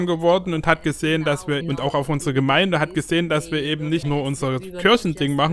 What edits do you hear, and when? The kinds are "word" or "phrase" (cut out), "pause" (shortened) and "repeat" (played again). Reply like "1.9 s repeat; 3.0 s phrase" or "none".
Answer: 1.6 s word; 4.0 s word